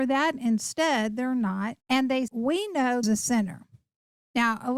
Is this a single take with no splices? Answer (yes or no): no